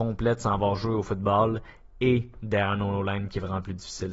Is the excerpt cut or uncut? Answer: uncut